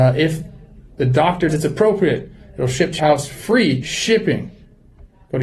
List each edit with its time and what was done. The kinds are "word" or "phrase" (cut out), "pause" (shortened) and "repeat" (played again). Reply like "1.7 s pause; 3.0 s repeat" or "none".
1.5 s word; 3.0 s word; 3.8 s word